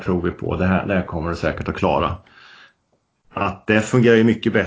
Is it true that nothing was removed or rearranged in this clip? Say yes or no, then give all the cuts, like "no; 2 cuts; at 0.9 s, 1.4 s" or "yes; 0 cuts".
yes; 0 cuts